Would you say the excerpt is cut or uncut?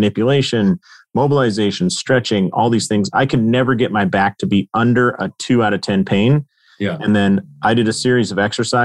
uncut